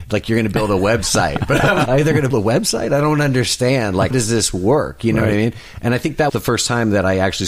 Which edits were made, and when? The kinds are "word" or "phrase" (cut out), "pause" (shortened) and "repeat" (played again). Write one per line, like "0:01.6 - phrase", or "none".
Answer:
0:01.9 - word
0:02.3 - word
0:04.1 - word
0:06.3 - word